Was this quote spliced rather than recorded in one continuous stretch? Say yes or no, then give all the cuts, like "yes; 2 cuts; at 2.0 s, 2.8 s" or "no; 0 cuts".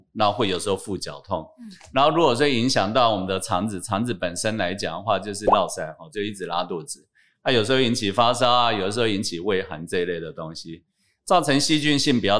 no; 0 cuts